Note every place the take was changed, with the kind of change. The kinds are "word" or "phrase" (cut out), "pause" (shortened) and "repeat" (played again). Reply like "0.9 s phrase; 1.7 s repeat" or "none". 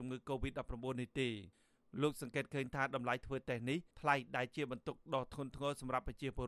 3.9 s pause